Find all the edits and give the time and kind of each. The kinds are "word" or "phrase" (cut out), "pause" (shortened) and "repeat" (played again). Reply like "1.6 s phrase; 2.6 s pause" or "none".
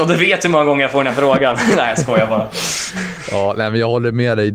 none